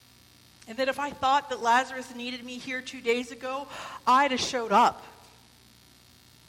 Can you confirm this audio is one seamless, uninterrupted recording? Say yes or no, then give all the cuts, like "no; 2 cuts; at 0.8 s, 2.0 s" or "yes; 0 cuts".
yes; 0 cuts